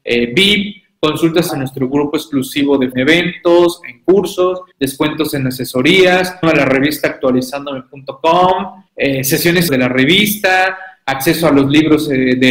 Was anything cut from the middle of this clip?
yes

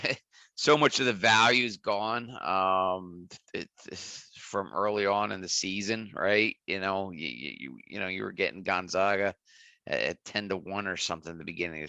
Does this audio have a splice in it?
no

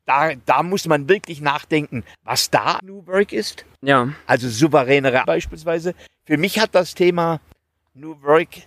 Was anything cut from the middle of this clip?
yes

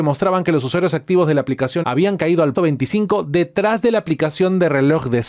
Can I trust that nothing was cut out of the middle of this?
no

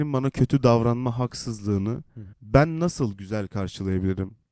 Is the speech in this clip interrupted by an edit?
yes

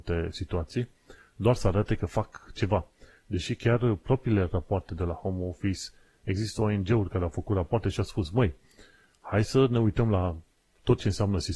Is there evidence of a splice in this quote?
no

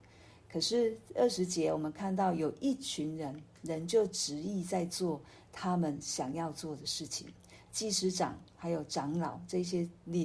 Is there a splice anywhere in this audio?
no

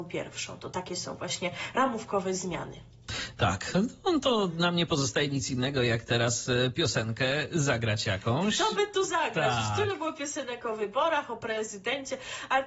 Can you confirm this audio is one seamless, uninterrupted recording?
yes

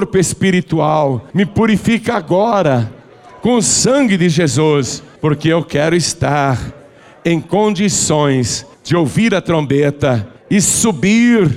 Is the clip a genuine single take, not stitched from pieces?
no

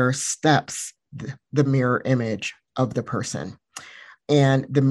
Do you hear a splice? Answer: no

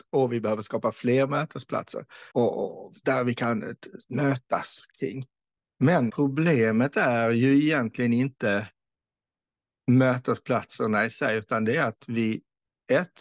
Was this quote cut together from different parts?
yes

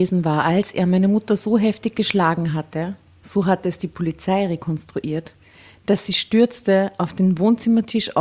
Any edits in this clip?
no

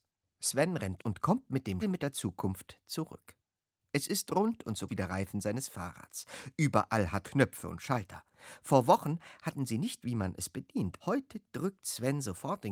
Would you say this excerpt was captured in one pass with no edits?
no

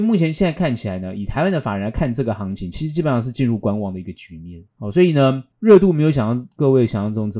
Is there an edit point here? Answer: yes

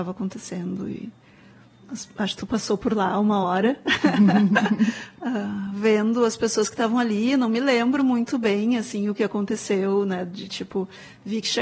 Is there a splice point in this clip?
no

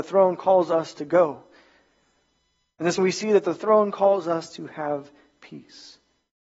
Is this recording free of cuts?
no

